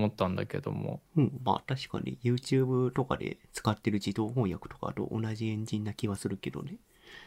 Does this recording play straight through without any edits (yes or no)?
no